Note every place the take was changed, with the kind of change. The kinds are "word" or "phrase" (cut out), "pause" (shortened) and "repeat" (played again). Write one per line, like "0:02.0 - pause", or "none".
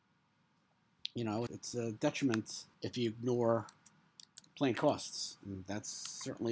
0:01.5 - word
0:02.7 - pause
0:04.4 - word